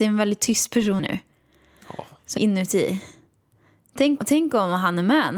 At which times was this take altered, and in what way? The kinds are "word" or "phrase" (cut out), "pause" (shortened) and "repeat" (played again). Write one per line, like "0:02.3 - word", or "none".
0:01.0 - word
0:02.4 - word
0:04.2 - word